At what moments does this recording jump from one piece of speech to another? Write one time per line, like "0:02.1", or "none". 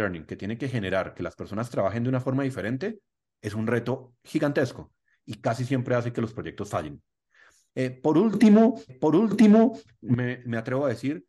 0:08.9